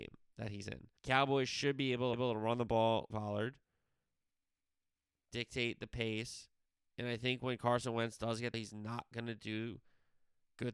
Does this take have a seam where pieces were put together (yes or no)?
yes